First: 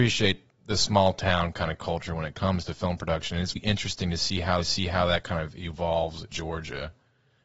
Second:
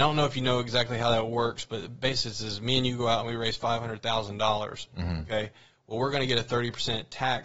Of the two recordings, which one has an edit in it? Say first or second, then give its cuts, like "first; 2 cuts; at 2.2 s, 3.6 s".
first; 3 cuts; at 3.6 s, 4.6 s, 6.3 s